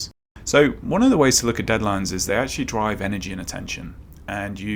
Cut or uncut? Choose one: uncut